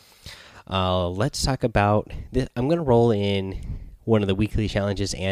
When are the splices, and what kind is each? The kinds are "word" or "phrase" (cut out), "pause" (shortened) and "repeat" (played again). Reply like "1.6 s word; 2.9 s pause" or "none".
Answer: none